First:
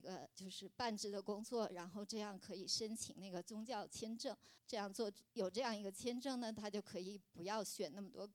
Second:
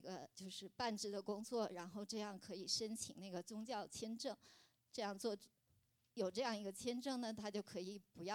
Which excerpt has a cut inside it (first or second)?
first